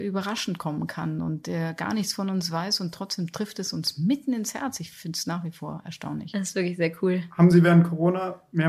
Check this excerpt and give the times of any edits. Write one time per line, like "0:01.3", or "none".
none